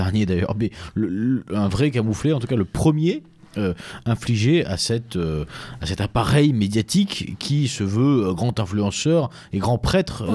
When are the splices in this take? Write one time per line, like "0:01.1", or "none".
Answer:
none